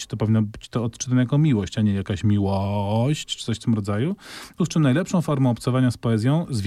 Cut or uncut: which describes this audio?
cut